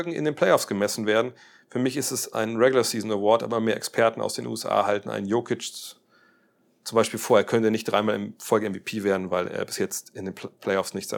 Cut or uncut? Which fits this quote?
uncut